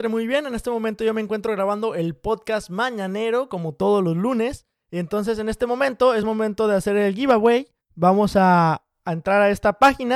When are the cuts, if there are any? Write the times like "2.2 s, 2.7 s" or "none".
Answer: none